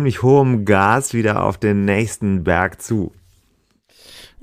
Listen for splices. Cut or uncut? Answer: uncut